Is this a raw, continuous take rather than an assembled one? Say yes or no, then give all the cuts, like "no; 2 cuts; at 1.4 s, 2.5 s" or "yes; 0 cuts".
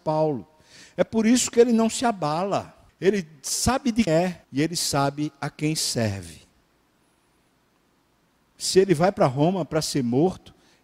no; 3 cuts; at 2.9 s, 4.1 s, 4.4 s